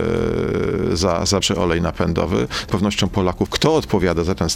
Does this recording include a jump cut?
yes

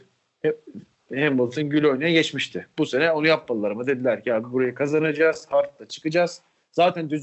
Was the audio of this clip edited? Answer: no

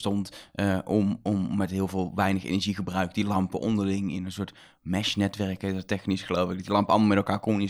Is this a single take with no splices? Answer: yes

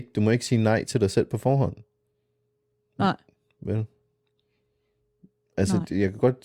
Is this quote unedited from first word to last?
yes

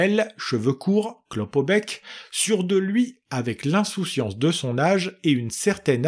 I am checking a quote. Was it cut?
no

